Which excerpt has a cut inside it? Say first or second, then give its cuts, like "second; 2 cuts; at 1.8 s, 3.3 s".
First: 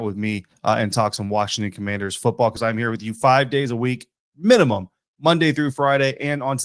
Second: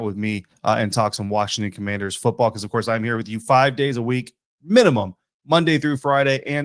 first; 1 cut; at 2.6 s